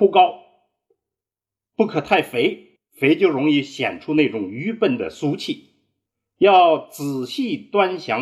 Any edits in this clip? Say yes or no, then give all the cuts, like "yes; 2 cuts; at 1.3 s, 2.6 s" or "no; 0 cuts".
yes; 2 cuts; at 2.8 s, 6.1 s